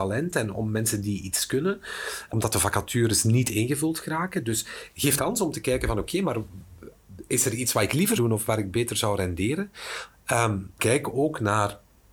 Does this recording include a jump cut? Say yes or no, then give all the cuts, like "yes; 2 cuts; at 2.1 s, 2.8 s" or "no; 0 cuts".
yes; 4 cuts; at 2.3 s, 5.2 s, 8.2 s, 10.8 s